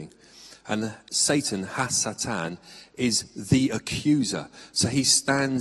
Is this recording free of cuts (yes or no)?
yes